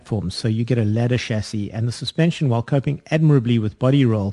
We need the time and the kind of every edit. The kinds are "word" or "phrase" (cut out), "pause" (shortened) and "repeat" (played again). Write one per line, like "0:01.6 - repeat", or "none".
none